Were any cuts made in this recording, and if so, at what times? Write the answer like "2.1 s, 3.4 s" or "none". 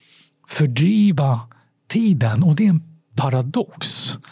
none